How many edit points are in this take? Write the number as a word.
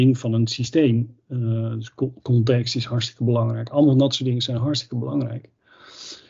zero